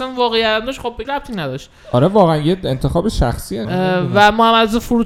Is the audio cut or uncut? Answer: cut